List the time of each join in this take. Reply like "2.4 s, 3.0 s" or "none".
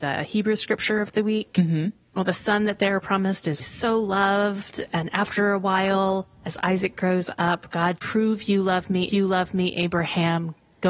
3.6 s, 8.0 s, 9.1 s